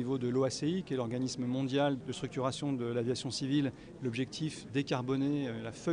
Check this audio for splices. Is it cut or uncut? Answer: cut